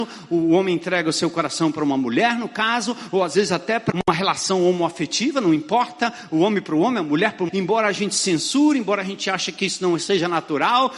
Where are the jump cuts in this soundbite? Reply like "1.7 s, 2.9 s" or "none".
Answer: 3.9 s, 7.5 s